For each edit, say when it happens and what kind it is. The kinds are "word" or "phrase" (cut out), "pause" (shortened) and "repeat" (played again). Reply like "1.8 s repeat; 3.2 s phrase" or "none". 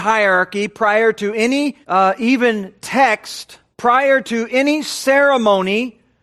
1.8 s pause; 3.7 s pause

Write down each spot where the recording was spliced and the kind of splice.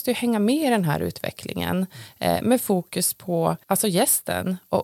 3.6 s pause

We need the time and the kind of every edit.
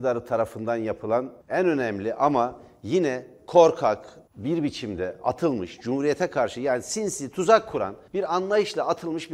1.4 s pause; 4.3 s pause; 8.1 s pause

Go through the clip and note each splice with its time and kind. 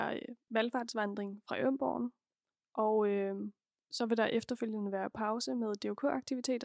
none

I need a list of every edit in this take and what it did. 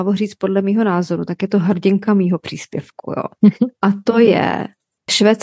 none

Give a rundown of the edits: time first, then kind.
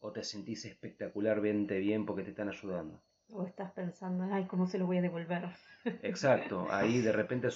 none

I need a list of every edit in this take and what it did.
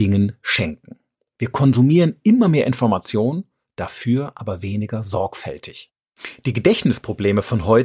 none

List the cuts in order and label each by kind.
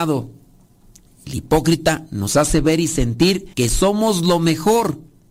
3.5 s pause

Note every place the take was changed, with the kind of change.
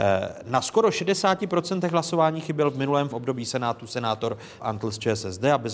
3.1 s word; 4.6 s word

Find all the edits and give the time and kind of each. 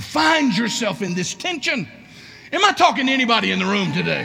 none

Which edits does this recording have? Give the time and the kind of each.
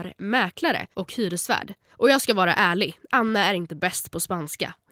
0.9 s pause; 1.9 s pause

